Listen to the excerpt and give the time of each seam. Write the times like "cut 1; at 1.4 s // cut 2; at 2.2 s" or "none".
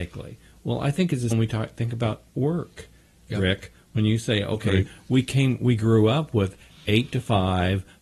cut 1; at 1.3 s